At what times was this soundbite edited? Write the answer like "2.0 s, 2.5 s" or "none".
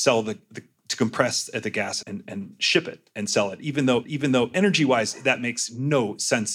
2.0 s, 4.0 s